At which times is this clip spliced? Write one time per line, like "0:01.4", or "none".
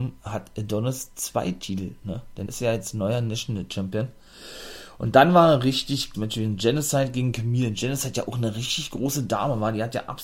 0:02.5
0:06.1